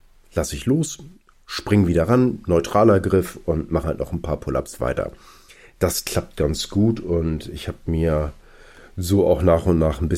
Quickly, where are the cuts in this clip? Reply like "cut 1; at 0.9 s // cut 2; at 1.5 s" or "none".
cut 1; at 3.8 s